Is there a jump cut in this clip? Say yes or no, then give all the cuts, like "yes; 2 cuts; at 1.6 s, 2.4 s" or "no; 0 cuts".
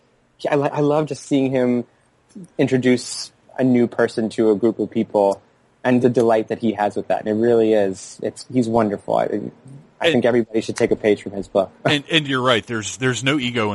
yes; 1 cut; at 6.0 s